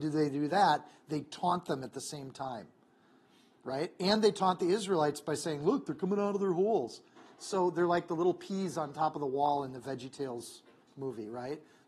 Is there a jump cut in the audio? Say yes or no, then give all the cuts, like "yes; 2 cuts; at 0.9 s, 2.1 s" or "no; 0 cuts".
no; 0 cuts